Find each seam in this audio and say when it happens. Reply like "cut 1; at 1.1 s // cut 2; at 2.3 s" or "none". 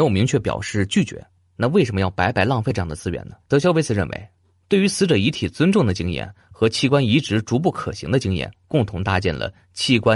cut 1; at 3.4 s